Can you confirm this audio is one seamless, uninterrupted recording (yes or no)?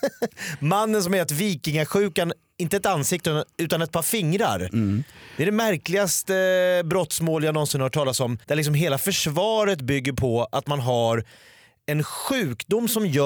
no